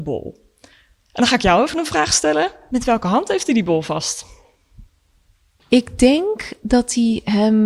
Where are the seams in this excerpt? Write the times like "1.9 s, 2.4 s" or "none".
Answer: none